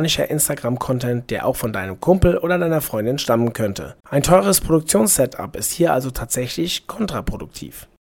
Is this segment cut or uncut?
cut